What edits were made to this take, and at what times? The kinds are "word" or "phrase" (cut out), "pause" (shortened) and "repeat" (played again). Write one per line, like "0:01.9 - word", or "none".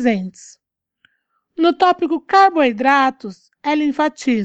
none